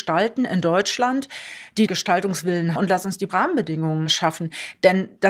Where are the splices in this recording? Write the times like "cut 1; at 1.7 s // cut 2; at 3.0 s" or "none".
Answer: cut 1; at 1.9 s // cut 2; at 2.8 s // cut 3; at 3.3 s